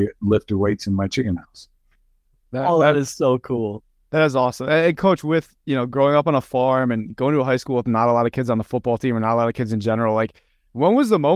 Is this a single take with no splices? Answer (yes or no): yes